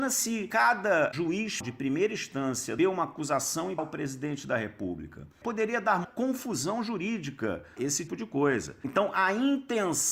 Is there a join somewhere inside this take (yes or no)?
yes